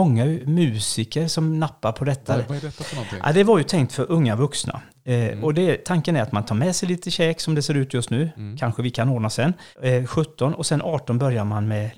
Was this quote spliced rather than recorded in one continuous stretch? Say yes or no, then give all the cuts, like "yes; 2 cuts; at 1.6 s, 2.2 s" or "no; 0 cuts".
yes; 1 cut; at 9.7 s